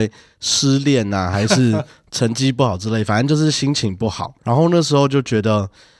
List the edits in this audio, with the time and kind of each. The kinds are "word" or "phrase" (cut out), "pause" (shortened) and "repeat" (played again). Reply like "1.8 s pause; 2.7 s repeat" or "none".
4.4 s pause